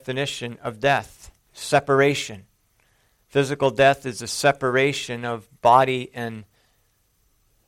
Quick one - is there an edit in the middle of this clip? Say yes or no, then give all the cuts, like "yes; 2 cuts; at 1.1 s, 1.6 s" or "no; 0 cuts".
no; 0 cuts